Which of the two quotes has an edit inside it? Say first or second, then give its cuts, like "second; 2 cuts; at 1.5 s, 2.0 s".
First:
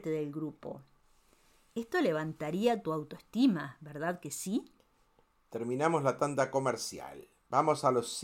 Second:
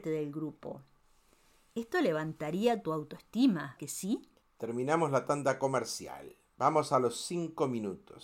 second; 2 cuts; at 3.8 s, 4.4 s